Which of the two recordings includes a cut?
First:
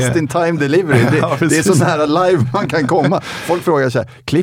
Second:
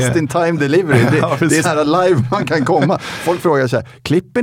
second; 1 cut; at 1.6 s

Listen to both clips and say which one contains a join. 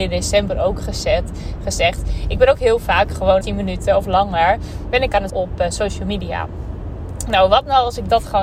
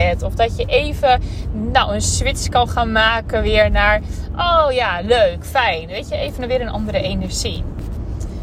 first; 2 cuts; at 3.4 s, 5.3 s

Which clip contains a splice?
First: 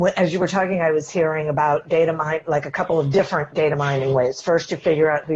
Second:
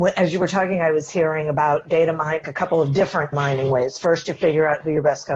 second; 2 cuts; at 2.4 s, 3.3 s

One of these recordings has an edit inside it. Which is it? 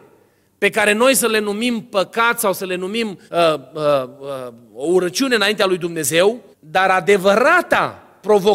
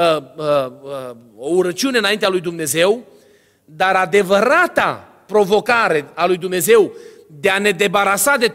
first; 2 cuts; at 3.3 s, 6.5 s

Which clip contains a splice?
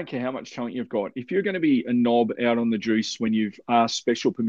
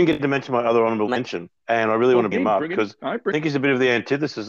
second; 3 cuts; at 1.6 s, 2.3 s, 3.3 s

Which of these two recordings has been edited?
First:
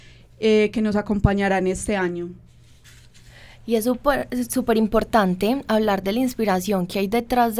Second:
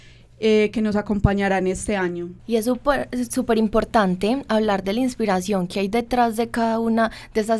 second; 1 cut; at 2.4 s

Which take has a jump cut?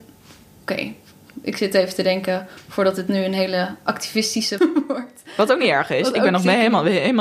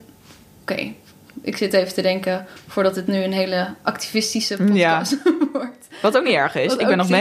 first; 1 cut; at 4.6 s

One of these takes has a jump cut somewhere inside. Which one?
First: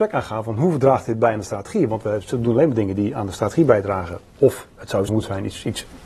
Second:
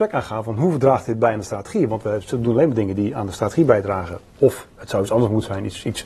first; 1 cut; at 5.1 s

